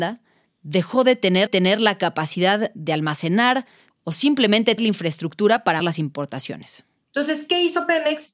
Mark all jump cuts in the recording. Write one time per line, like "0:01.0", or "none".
0:01.5
0:03.9
0:04.8
0:05.8